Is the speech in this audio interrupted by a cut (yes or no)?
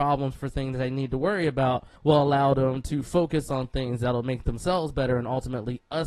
yes